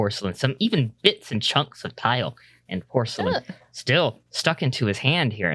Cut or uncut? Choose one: uncut